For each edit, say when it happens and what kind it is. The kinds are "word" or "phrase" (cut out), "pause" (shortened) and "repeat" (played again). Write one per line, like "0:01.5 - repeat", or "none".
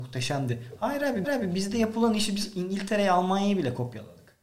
0:01.2 - repeat